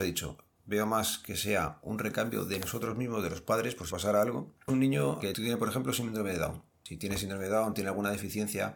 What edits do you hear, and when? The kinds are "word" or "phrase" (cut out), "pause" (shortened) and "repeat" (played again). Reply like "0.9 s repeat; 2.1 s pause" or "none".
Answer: 3.9 s word; 4.7 s phrase; 5.2 s word

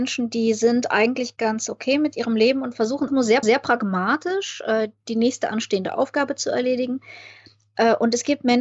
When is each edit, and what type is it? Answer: 3.1 s word; 3.4 s repeat

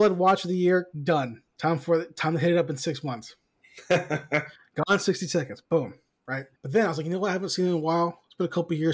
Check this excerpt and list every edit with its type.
1.5 s pause; 6.6 s pause

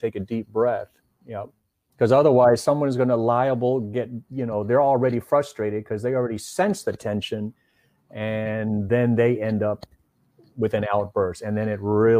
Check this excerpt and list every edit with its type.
none

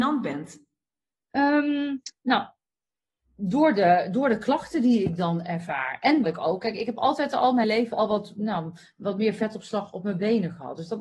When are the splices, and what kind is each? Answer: 6.2 s word; 7.6 s word

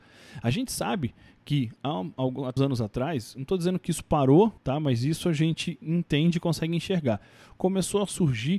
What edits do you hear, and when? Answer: 2.6 s word; 4.6 s pause

